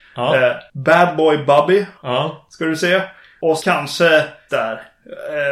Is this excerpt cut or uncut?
cut